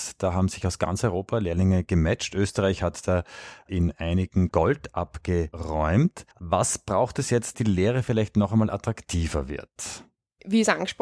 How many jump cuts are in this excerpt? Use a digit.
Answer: 3